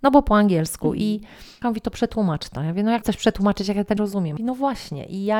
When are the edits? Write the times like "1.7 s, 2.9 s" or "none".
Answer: 1.6 s, 3.0 s, 4.0 s, 4.4 s